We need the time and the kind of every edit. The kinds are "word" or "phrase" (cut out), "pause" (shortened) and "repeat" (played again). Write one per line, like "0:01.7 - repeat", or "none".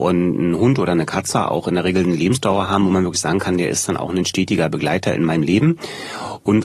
none